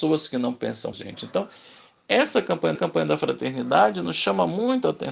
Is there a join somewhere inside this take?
yes; 2 cuts; at 0.9 s, 2.7 s

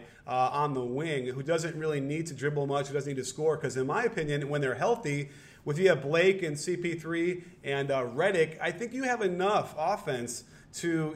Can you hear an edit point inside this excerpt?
no; 0 cuts

